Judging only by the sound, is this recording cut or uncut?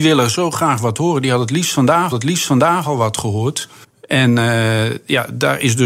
cut